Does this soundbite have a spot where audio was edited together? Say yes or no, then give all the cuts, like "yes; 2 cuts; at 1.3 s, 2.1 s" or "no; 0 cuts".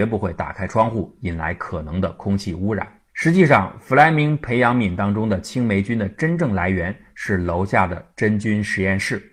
yes; 1 cut; at 3.1 s